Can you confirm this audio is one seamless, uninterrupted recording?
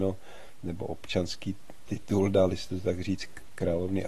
yes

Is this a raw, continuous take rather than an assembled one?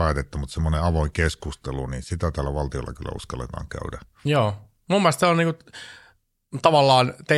yes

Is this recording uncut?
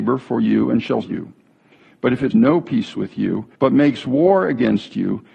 no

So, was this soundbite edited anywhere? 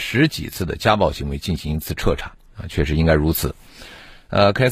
yes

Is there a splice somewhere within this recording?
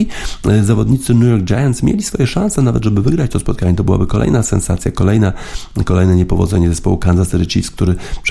no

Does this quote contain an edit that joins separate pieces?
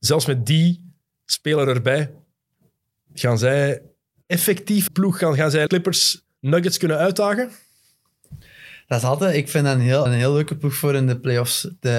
yes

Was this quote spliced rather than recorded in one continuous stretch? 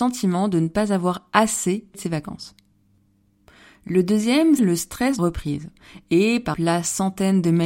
yes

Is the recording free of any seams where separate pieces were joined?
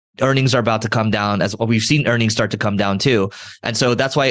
yes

